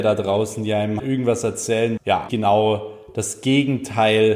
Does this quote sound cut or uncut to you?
cut